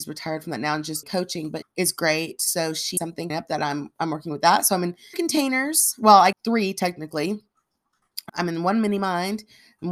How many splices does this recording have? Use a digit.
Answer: 7